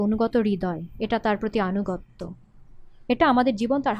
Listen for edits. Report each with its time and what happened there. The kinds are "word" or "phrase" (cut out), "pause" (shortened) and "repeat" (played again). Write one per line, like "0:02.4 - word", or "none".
none